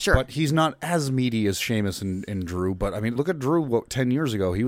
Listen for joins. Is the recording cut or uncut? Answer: cut